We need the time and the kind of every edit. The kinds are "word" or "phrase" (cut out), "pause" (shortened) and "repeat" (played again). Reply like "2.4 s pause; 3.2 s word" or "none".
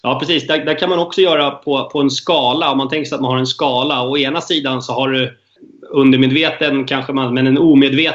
none